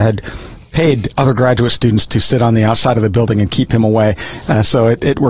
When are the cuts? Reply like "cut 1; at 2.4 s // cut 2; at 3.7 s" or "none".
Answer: none